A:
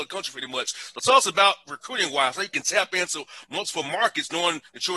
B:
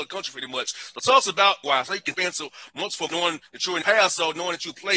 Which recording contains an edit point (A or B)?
B